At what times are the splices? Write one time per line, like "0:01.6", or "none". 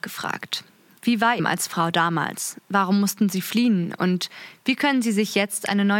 0:01.4